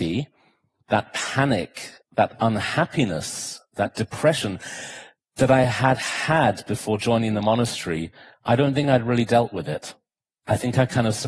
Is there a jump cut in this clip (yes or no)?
no